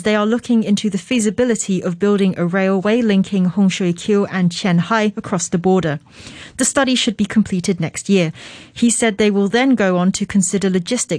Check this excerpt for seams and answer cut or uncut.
uncut